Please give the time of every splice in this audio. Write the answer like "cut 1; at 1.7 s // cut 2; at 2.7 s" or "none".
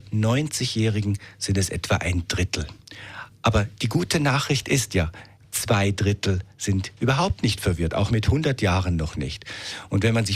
none